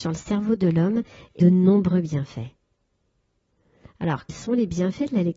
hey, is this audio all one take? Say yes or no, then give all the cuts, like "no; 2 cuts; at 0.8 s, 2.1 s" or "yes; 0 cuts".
no; 2 cuts; at 1.4 s, 4.3 s